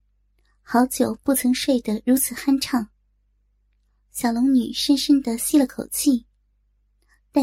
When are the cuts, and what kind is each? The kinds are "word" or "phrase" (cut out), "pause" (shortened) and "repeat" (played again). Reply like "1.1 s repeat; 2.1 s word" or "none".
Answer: none